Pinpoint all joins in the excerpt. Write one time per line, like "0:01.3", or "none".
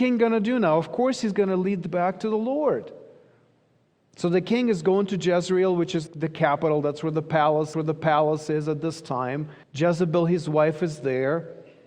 0:01.9
0:06.1
0:07.7
0:09.6